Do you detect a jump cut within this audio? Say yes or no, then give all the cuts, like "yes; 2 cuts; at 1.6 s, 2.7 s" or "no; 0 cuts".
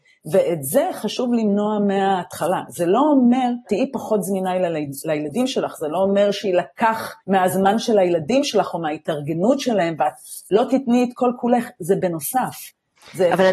yes; 2 cuts; at 3.7 s, 7.2 s